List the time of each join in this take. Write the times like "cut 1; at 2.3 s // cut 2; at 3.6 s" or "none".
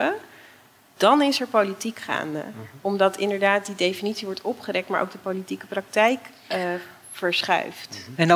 none